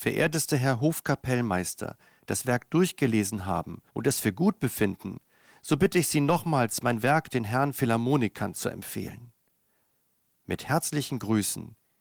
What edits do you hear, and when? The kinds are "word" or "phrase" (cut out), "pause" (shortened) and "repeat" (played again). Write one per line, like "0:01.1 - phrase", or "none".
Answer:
0:03.9 - pause